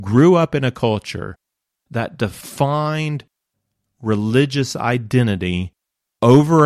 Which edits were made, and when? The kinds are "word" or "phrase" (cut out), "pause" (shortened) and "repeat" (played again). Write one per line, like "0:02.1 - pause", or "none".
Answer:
none